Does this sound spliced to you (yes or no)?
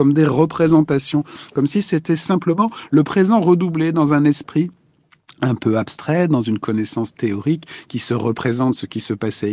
no